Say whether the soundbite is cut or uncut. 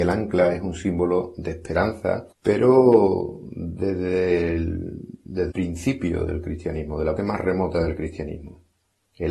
cut